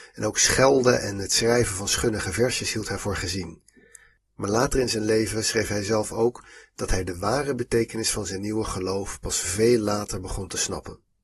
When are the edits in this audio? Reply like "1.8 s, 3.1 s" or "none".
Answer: none